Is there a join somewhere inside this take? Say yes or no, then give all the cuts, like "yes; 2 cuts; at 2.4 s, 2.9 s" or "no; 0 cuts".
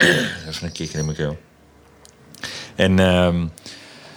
no; 0 cuts